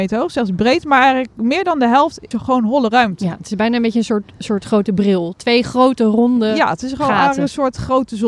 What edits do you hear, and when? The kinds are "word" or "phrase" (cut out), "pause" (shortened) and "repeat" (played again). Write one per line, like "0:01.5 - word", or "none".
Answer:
0:02.3 - word